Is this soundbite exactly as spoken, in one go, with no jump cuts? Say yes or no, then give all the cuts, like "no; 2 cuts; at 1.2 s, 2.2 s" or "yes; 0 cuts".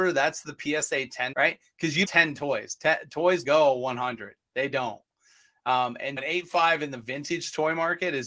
no; 4 cuts; at 1.3 s, 2.0 s, 3.4 s, 6.2 s